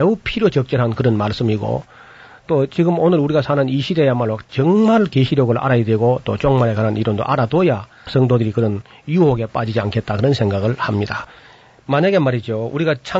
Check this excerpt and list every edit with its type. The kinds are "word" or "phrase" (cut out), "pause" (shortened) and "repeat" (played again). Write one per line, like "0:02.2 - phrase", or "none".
none